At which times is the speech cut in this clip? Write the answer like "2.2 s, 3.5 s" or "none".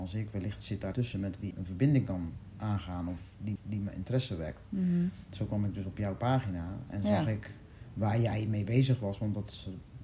0.9 s, 1.5 s, 3.6 s